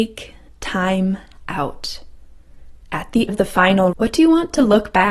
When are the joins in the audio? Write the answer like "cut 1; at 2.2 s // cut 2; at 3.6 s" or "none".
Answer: cut 1; at 3.3 s // cut 2; at 3.9 s